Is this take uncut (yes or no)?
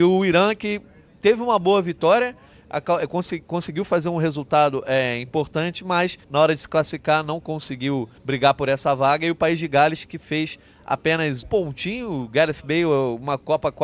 no